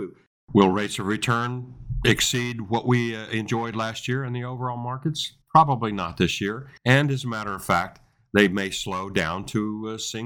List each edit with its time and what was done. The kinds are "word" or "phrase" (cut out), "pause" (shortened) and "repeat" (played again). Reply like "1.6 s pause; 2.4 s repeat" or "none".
5.4 s pause; 6.8 s pause